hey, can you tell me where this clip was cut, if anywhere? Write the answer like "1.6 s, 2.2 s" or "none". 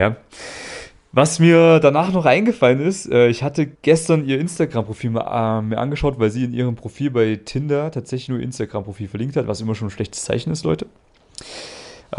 3.7 s

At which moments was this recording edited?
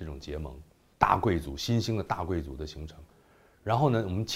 0.9 s

